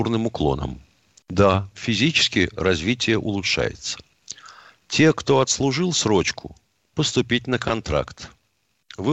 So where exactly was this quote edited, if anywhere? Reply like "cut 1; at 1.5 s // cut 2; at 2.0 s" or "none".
cut 1; at 6.9 s